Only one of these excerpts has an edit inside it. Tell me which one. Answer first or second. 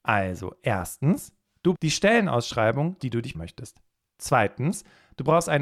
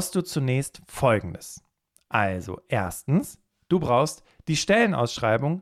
first